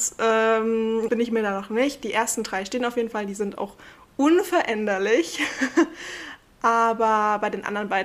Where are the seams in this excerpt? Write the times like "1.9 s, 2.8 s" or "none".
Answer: 1.1 s